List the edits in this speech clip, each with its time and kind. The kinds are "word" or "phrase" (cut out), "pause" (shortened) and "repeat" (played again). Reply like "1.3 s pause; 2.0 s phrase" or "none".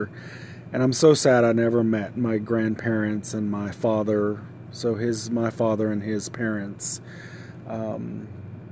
none